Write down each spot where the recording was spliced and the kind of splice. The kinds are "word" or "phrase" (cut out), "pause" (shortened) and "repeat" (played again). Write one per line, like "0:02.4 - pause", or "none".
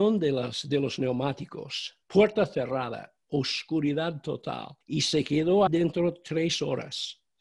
0:02.0 - pause
0:04.8 - pause
0:05.7 - word